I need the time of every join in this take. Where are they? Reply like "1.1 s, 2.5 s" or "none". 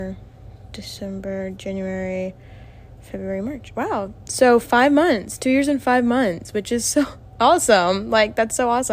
none